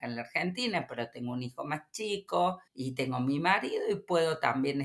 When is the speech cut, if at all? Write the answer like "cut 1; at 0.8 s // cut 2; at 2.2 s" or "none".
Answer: cut 1; at 2.7 s